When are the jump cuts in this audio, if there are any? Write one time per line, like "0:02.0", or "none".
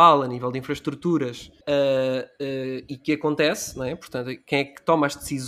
0:01.6